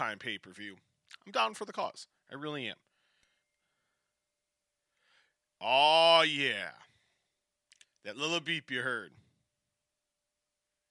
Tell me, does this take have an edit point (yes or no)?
no